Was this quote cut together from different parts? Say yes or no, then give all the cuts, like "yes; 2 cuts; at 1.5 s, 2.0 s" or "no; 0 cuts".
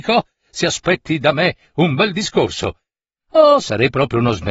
no; 0 cuts